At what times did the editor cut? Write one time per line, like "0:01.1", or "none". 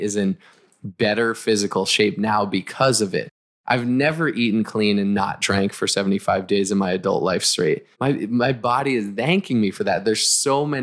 0:07.9